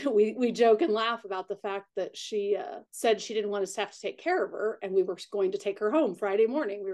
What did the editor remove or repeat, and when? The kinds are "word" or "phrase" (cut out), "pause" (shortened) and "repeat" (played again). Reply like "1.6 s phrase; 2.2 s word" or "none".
2.9 s pause